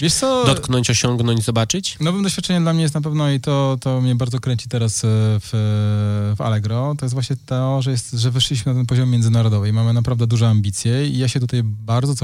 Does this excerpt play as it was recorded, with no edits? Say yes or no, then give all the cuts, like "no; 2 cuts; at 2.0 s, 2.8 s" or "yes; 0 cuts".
yes; 0 cuts